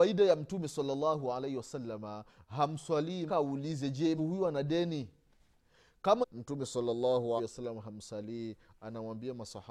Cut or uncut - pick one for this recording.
cut